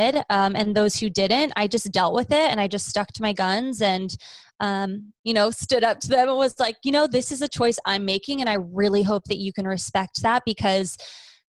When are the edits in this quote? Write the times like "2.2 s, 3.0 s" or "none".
none

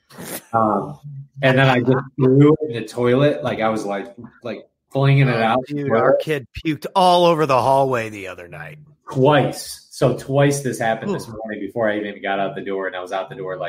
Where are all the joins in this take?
none

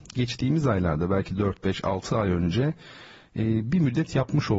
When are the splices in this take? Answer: none

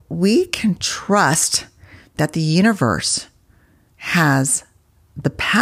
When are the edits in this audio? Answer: none

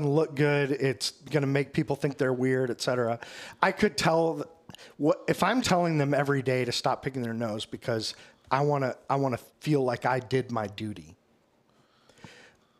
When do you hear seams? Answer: 5.6 s, 9.5 s

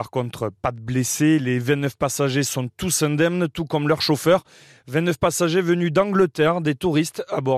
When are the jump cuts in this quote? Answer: none

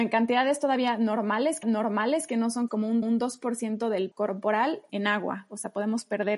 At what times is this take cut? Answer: 1.6 s, 2.7 s, 3.0 s, 4.1 s, 4.9 s

